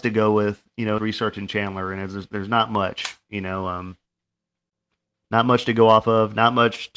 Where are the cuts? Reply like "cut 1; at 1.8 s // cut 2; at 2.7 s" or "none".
cut 1; at 1.0 s

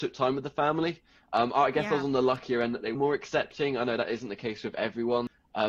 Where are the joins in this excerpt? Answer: cut 1; at 2.9 s

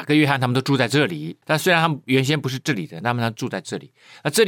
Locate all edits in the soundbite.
cut 1; at 1.4 s

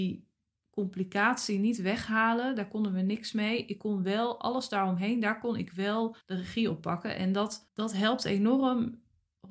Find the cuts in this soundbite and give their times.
cut 1; at 6.2 s

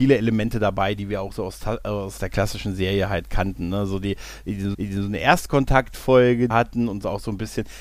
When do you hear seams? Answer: cut 1; at 2.2 s // cut 2; at 4.7 s // cut 3; at 6.5 s

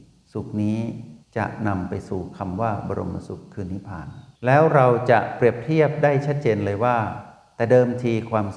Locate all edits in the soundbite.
cut 1; at 4.4 s

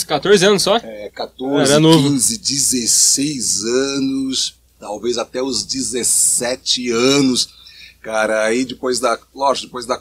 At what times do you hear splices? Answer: cut 1; at 1.1 s // cut 2; at 4.7 s

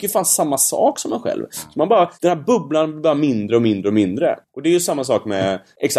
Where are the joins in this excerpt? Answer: cut 1; at 2.1 s

